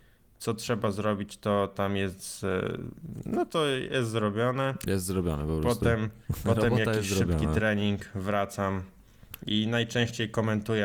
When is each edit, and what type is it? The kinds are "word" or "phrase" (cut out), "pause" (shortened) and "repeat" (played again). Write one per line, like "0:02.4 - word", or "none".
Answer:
0:06.2 - pause